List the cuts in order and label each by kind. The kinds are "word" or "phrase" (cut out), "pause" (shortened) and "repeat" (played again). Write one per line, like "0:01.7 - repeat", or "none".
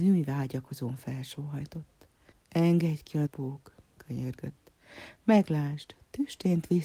0:02.3 - pause
0:03.3 - word

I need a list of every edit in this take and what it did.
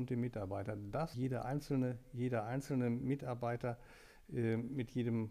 0:01.1 - phrase

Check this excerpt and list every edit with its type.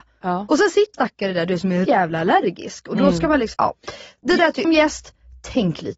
0:00.9 - word
0:01.8 - word
0:03.5 - word
0:04.6 - word

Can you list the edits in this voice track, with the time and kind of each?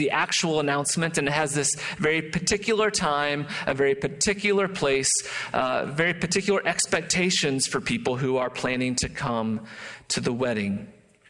none

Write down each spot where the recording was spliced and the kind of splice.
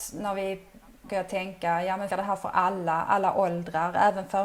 0:01.1 - phrase
0:02.1 - word

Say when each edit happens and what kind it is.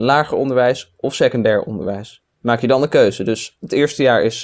0:02.3 - pause

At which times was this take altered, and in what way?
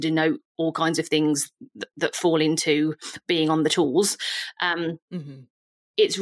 none

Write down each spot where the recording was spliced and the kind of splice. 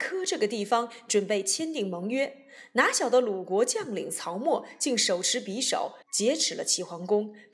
0:06.0 - pause

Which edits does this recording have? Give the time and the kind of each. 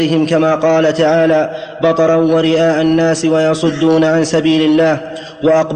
none

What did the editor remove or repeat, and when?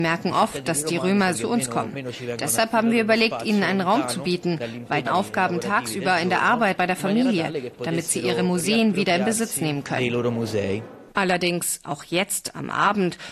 0:01.3 - word
0:05.1 - phrase
0:06.8 - word

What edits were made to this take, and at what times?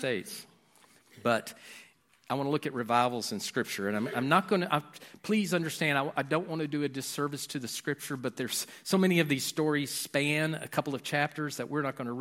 none

